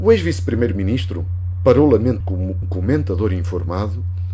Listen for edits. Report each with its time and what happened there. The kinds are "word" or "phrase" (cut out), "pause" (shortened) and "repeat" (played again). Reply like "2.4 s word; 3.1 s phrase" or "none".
2.2 s word; 2.6 s word